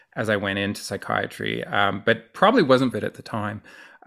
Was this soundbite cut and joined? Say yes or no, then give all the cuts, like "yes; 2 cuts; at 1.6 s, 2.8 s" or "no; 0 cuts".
yes; 1 cut; at 2.9 s